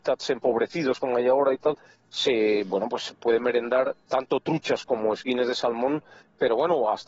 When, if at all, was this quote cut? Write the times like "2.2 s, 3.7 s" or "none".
none

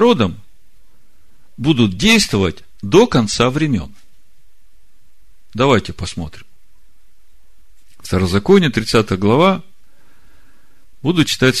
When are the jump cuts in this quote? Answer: none

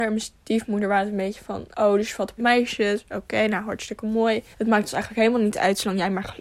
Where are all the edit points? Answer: 1.7 s, 2.4 s, 4.5 s

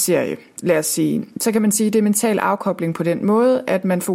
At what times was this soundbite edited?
none

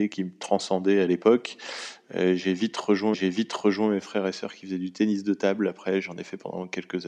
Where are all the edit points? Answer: 3.1 s

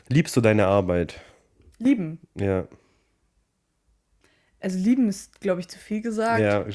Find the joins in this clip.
none

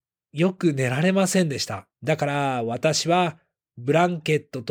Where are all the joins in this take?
1.9 s

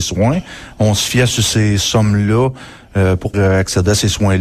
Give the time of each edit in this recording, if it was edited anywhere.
3.3 s

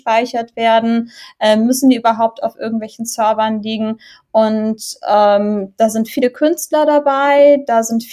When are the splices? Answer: none

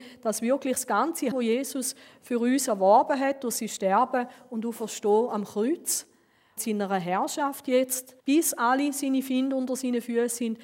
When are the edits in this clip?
1.3 s, 6.6 s, 8.2 s

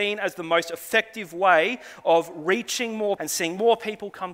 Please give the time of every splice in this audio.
3.2 s

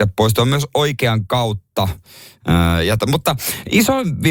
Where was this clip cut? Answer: 3.0 s

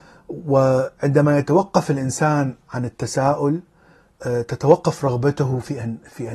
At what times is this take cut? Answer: none

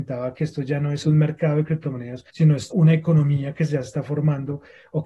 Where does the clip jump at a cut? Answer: 1.0 s, 2.3 s, 2.7 s

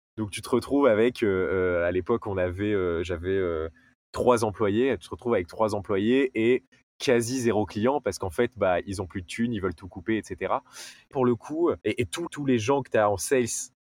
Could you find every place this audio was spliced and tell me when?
11.1 s, 11.8 s, 12.3 s

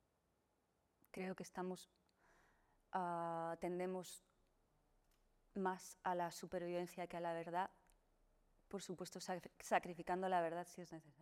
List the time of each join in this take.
none

